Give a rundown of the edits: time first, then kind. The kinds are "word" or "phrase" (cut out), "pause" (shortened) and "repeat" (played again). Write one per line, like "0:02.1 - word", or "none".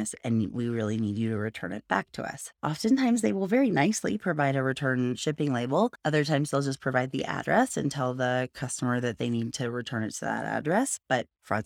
none